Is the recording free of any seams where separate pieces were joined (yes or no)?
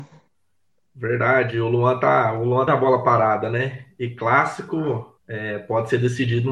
no